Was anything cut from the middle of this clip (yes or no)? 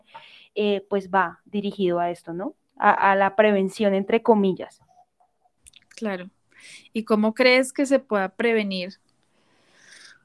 no